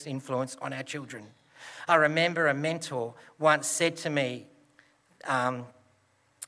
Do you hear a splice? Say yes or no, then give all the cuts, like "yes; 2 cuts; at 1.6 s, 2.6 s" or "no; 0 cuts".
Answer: no; 0 cuts